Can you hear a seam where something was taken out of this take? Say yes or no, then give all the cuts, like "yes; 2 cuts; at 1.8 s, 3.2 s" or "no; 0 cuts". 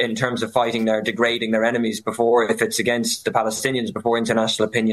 no; 0 cuts